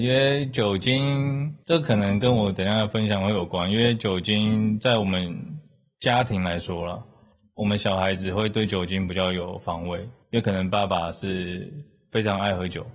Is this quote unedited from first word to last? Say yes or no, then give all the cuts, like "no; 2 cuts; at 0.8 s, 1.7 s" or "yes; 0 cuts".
yes; 0 cuts